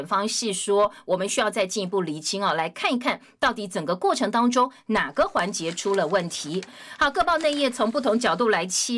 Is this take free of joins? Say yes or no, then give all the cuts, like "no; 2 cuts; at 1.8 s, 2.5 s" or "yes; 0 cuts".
yes; 0 cuts